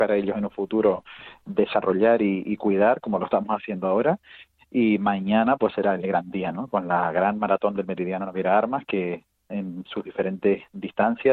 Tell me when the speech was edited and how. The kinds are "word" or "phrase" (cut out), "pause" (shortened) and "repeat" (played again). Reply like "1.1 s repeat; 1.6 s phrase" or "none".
none